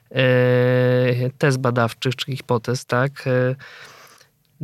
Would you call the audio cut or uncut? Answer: uncut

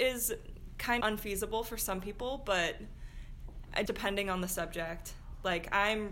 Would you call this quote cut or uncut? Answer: cut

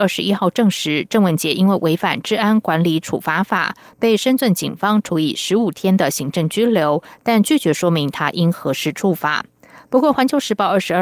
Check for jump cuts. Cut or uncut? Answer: uncut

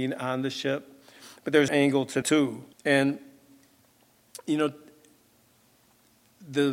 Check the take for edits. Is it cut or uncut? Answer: cut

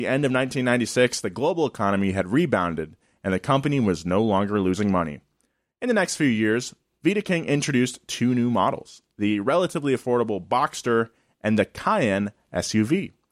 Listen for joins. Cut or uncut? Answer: uncut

